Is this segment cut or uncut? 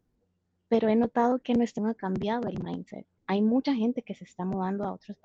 cut